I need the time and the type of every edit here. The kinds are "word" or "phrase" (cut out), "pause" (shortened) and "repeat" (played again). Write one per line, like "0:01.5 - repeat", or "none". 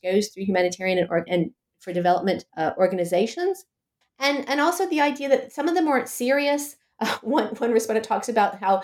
0:01.3 - word
0:02.5 - pause
0:04.0 - pause